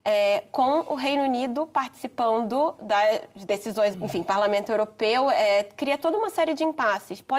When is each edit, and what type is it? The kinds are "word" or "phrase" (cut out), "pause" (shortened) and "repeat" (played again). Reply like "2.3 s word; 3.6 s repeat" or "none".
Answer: 3.9 s word